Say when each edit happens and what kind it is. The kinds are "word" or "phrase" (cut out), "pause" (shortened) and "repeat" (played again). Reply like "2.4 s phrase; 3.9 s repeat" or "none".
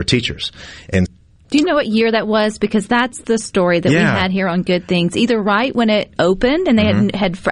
1.1 s word; 6.2 s word

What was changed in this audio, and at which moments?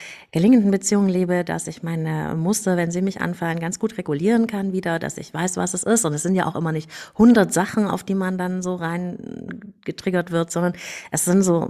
none

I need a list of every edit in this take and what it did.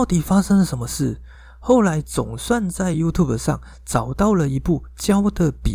none

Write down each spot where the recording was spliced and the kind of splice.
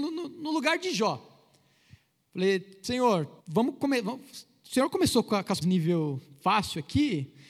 3.4 s pause; 5.6 s word

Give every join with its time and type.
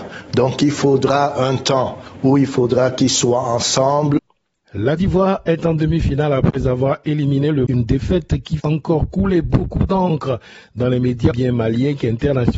5.0 s word; 7.7 s word; 8.6 s word; 11.3 s word

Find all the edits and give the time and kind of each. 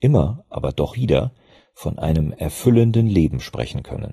0.9 s word

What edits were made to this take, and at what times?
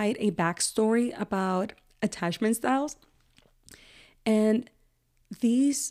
none

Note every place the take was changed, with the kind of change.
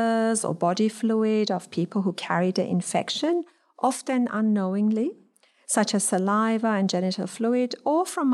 none

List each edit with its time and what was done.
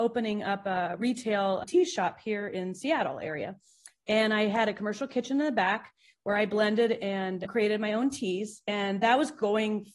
none

